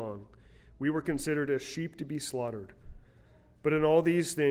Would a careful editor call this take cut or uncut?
uncut